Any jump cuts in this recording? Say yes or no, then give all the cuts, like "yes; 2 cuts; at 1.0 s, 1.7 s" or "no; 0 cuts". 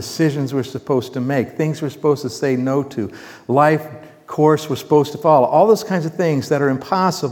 no; 0 cuts